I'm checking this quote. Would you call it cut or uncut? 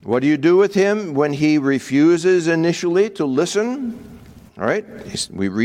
cut